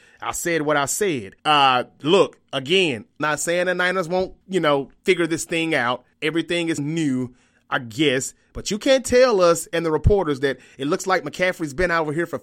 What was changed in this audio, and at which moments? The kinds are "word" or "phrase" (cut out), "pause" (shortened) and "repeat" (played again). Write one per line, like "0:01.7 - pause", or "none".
0:01.4 - pause
0:03.2 - word
0:04.4 - pause
0:05.0 - word
0:06.1 - pause
0:06.8 - word